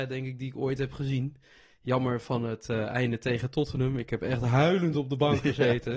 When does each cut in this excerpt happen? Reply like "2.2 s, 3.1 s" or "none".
none